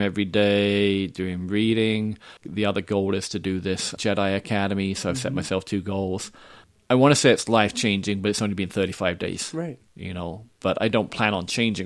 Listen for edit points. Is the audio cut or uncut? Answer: cut